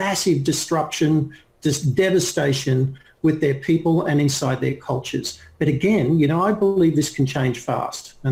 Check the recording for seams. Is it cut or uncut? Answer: uncut